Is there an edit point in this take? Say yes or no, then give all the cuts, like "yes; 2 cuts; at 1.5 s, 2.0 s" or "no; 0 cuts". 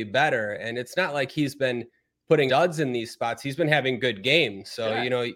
yes; 1 cut; at 2.5 s